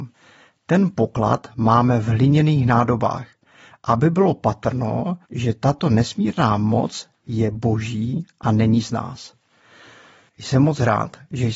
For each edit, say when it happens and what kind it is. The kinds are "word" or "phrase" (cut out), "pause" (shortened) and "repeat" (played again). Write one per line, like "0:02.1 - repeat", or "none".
0:05.2 - pause

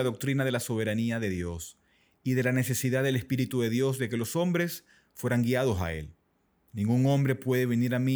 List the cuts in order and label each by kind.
none

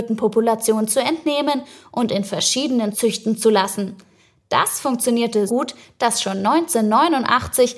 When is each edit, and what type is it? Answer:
0:02.9 - word
0:05.5 - word

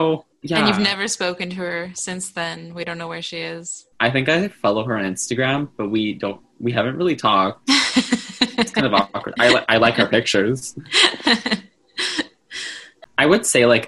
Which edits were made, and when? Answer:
0:03.9 - pause

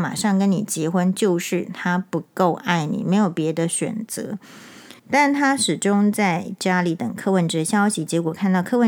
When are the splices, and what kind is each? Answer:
0:05.0 - pause

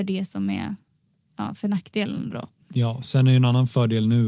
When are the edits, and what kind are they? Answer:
none

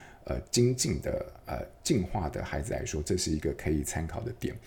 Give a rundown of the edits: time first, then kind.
none

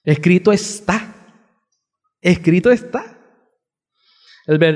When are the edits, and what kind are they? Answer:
none

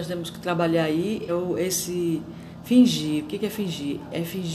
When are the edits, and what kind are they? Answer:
0:01.3 - word

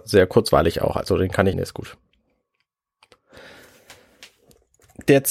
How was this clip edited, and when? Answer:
0:01.5 - word

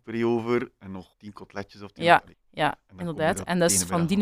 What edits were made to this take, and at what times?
0:01.1 - pause
0:02.3 - pause

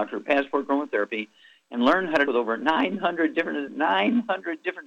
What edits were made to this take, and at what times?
0:02.3 - word
0:03.7 - word

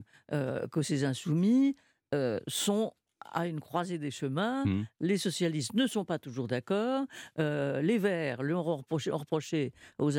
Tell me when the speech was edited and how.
none

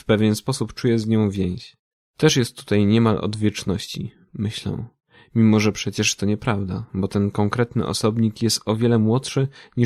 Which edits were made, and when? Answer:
0:01.9 - pause

